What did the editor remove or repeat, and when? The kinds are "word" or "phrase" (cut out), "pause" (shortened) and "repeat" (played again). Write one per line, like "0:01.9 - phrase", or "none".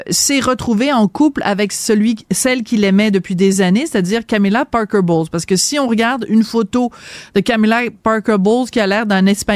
none